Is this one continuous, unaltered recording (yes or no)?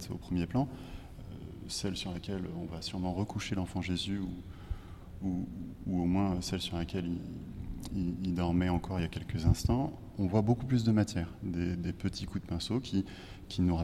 yes